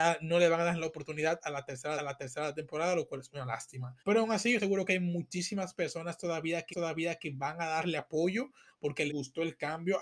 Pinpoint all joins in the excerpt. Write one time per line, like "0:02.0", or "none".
0:02.0
0:04.0
0:04.6
0:06.7
0:09.1